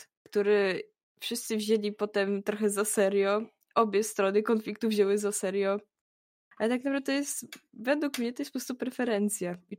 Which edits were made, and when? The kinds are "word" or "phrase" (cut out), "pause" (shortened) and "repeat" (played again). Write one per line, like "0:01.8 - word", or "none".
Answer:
none